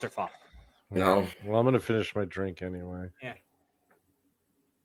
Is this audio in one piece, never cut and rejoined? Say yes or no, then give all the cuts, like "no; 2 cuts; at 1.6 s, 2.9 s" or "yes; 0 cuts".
no; 2 cuts; at 1.3 s, 3.1 s